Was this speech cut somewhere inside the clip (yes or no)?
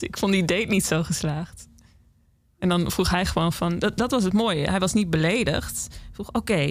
no